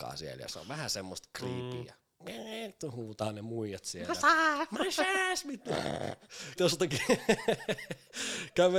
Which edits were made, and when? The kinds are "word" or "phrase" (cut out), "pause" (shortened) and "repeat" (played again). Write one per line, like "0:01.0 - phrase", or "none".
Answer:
0:06.6 - word